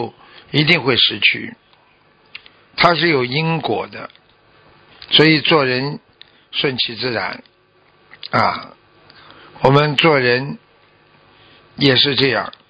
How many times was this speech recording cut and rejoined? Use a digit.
0